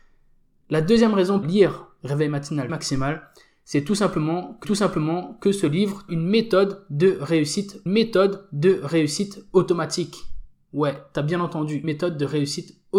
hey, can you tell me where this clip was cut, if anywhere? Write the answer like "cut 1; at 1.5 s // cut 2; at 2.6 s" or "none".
cut 1; at 1.4 s // cut 2; at 2.7 s // cut 3; at 4.6 s // cut 4; at 6.1 s // cut 5; at 7.9 s // cut 6; at 11.8 s